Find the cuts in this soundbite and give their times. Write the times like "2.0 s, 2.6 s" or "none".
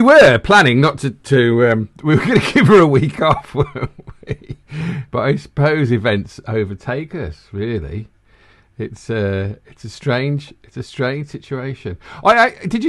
none